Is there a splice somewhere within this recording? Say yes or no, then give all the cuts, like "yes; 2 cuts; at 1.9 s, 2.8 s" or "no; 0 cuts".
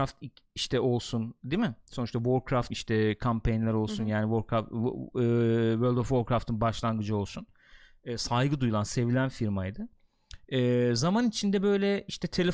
yes; 1 cut; at 2.7 s